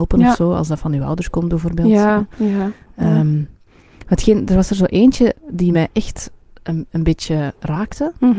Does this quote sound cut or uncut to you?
uncut